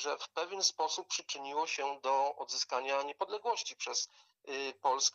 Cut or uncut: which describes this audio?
uncut